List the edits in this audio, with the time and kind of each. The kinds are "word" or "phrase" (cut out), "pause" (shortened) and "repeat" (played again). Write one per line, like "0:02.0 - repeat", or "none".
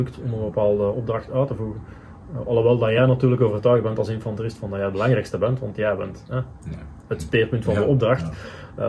none